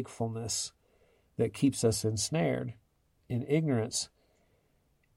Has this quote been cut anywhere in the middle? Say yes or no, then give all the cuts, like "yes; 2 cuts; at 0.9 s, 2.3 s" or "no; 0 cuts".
no; 0 cuts